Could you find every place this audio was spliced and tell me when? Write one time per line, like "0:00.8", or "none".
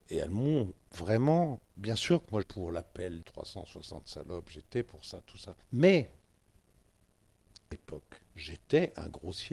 0:01.7
0:02.4
0:03.2
0:05.6
0:07.7
0:08.3